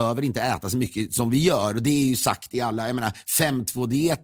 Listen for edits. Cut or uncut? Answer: uncut